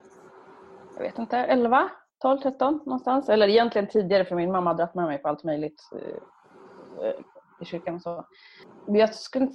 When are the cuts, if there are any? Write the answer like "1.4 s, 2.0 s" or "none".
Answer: none